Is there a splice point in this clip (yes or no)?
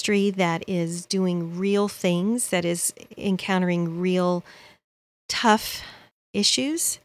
no